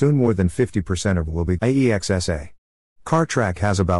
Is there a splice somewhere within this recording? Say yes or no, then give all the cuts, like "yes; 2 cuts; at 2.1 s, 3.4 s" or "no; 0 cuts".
yes; 2 cuts; at 1.3 s, 1.6 s